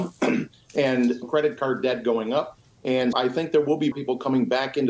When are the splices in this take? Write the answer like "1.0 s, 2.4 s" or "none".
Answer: 1.2 s, 3.1 s, 3.9 s